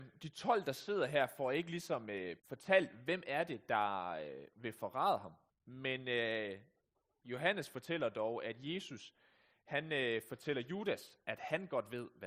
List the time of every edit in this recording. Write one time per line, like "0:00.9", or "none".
0:02.4
0:05.5

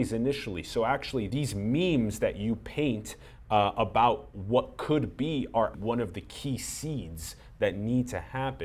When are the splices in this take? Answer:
0:01.3
0:05.7

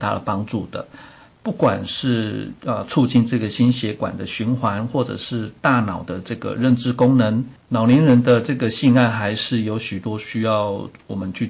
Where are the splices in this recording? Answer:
0:02.6

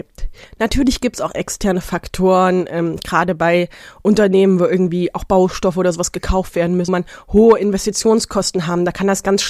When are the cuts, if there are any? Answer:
0:06.9

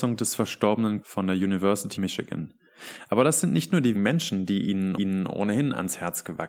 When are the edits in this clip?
0:01.0
0:02.0
0:03.9
0:05.0

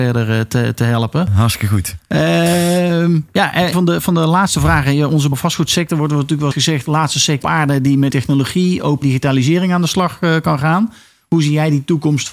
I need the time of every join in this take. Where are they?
0:03.7
0:05.3
0:06.5
0:07.4
0:08.1
0:09.0

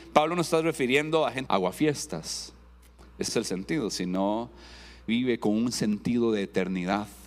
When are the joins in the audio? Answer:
0:01.5
0:03.3
0:05.1

